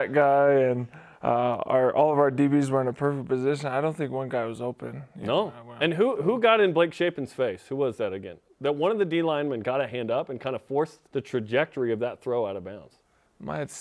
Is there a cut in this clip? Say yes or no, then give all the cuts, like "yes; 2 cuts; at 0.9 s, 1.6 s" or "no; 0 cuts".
yes; 1 cut; at 11.1 s